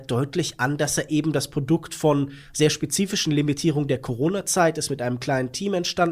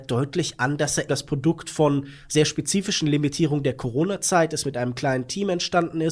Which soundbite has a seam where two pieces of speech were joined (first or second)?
second